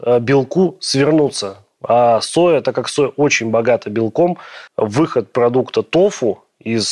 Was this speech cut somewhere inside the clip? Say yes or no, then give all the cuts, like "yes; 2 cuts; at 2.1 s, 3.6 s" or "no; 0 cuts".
yes; 1 cut; at 4.7 s